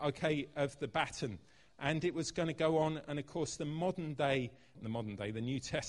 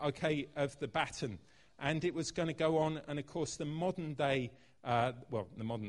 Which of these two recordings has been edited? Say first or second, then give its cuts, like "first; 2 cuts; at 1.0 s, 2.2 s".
first; 1 cut; at 4.7 s